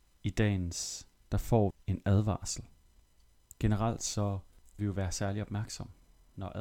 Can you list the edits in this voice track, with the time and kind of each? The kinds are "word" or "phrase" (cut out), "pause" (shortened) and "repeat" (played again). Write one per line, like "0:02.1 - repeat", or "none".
0:01.2 - word
0:01.7 - word
0:04.8 - word